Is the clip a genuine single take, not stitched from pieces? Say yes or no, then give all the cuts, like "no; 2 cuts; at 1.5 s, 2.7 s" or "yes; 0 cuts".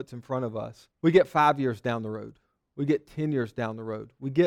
no; 1 cut; at 0.9 s